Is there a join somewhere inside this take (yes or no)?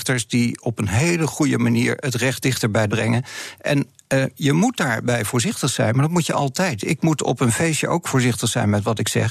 yes